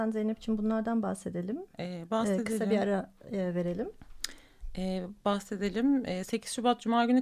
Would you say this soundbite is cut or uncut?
uncut